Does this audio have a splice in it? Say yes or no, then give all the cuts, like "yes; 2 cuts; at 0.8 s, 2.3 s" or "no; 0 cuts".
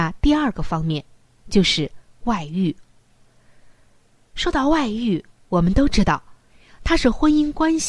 no; 0 cuts